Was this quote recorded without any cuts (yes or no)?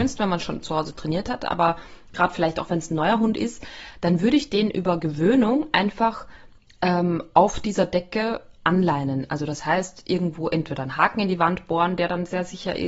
yes